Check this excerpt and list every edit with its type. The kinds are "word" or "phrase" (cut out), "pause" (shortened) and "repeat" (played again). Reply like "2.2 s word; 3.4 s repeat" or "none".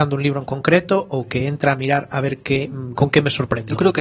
none